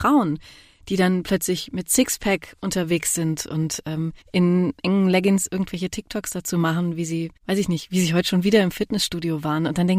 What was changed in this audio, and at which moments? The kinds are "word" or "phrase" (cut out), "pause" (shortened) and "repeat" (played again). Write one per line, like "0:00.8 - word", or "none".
0:04.2 - pause
0:07.4 - pause